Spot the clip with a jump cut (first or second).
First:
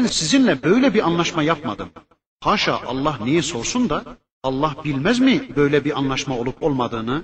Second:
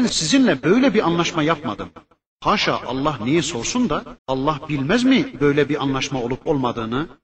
second